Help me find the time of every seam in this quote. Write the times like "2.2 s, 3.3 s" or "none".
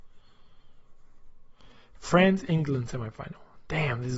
none

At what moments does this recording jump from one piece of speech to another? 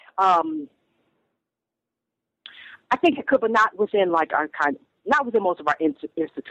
none

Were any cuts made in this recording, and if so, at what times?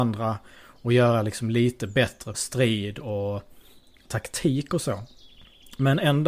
2.3 s

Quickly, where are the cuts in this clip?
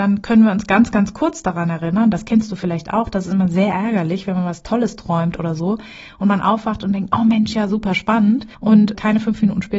8.5 s

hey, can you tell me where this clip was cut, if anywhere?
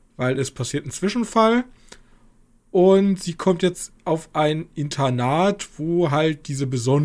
none

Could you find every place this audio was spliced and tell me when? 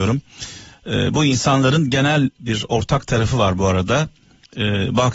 none

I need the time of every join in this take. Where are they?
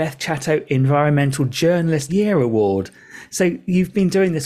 2.1 s

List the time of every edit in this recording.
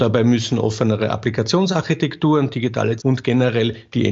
3.0 s

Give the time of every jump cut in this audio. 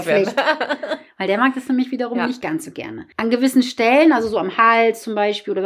none

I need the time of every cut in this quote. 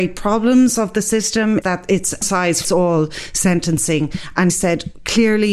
1.6 s, 2.2 s, 2.6 s, 4.5 s

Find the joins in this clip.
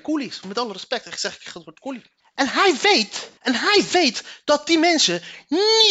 2.2 s, 3.4 s

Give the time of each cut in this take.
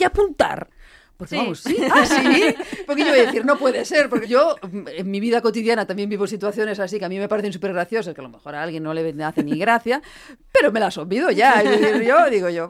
3.4 s, 4.2 s

